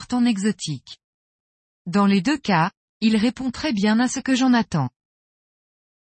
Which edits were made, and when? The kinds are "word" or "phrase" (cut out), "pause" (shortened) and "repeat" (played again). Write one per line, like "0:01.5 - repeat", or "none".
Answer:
none